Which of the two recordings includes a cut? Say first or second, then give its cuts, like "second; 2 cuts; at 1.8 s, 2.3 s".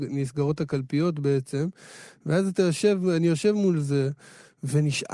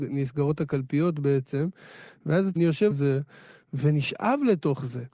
second; 2 cuts; at 2.6 s, 2.9 s